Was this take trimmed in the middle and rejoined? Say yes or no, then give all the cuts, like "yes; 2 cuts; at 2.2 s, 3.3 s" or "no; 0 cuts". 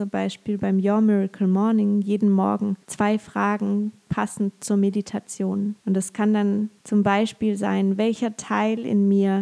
yes; 3 cuts; at 2.8 s, 5.8 s, 6.8 s